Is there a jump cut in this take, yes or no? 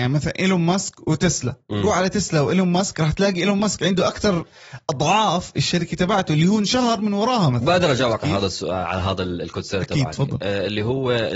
no